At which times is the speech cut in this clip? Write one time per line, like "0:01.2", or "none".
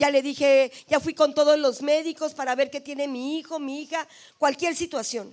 none